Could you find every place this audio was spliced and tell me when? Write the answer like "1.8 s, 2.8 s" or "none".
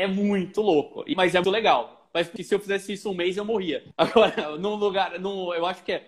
1.1 s, 1.4 s, 2.4 s, 3.9 s